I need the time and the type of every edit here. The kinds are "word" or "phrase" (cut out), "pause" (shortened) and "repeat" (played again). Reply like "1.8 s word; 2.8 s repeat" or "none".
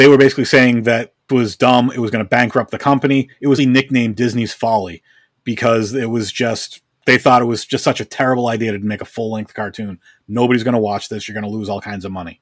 1.3 s word; 3.6 s word